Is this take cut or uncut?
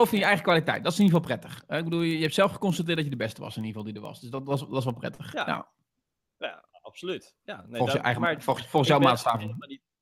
uncut